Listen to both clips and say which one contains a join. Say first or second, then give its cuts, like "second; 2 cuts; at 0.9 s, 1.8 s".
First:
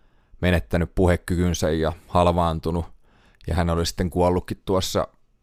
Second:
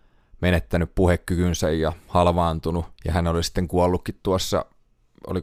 second; 1 cut; at 2.9 s